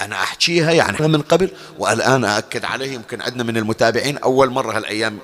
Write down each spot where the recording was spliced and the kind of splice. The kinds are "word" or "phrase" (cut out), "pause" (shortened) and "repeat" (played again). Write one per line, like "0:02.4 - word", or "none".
0:01.0 - word